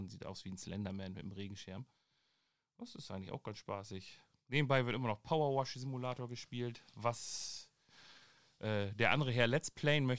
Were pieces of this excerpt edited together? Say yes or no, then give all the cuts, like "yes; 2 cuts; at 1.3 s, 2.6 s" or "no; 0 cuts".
no; 0 cuts